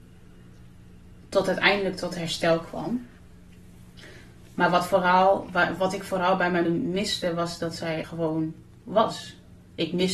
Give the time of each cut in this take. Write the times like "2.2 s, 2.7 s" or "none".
6.6 s, 8.0 s

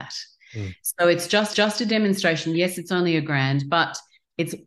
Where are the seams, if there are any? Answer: 1.5 s

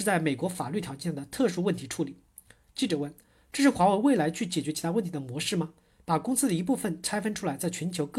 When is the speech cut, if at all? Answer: none

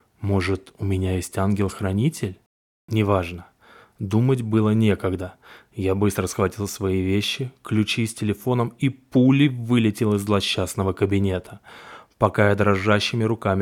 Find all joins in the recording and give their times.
none

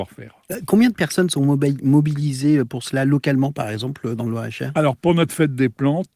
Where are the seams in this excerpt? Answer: none

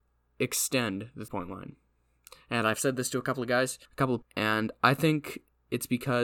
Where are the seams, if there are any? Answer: 1.3 s, 3.8 s, 4.2 s

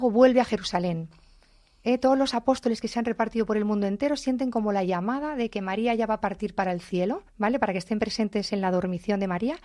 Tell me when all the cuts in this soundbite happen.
7.3 s

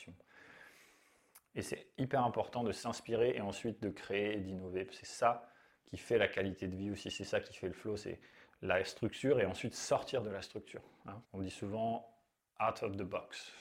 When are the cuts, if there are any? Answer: 11.2 s

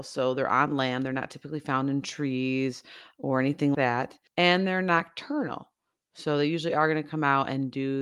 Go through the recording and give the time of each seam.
3.7 s, 4.3 s

